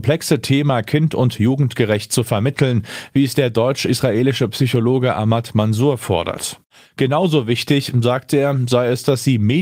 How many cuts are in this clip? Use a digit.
0